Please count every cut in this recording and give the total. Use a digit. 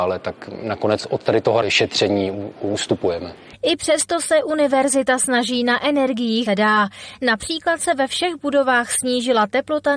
2